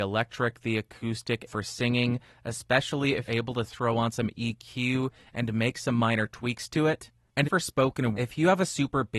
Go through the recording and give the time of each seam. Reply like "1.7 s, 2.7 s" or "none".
1.5 s, 3.3 s, 7.4 s, 8.1 s